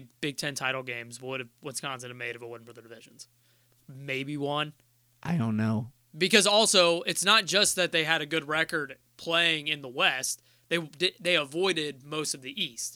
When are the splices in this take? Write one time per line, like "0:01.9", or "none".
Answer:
none

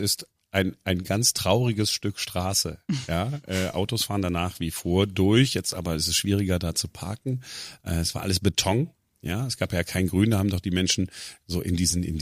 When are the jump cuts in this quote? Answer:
none

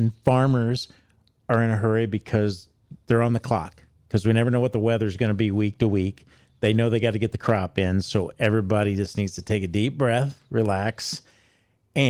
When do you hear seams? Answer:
none

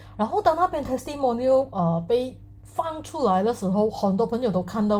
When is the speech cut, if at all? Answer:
0:02.6

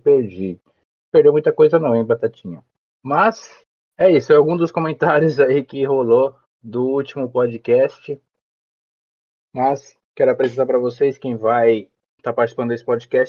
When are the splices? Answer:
0:02.9
0:06.4
0:10.0

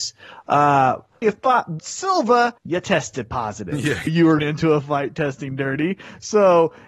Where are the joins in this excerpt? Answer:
0:01.2
0:01.8
0:02.6
0:04.1
0:04.4

